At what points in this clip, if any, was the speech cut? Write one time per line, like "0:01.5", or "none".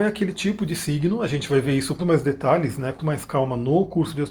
0:02.0
0:03.0